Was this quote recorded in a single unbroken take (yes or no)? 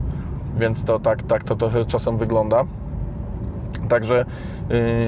yes